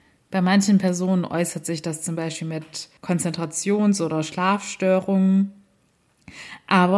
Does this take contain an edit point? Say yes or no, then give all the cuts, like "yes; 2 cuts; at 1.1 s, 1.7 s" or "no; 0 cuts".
yes; 1 cut; at 3.0 s